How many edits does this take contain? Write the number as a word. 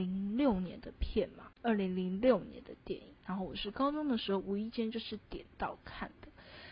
one